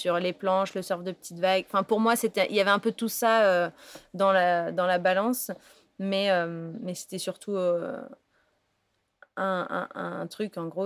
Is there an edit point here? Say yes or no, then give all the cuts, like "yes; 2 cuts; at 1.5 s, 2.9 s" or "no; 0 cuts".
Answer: no; 0 cuts